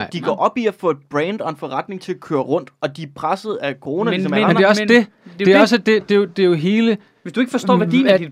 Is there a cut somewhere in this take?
no; 0 cuts

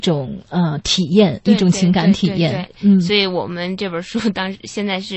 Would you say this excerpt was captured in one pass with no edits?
no; 1 cut; at 2.7 s

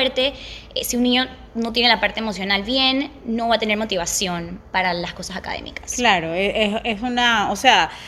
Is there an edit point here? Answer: no; 0 cuts

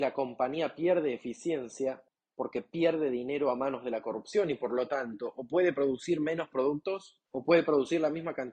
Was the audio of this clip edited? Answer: yes; 2 cuts; at 2.1 s, 7.3 s

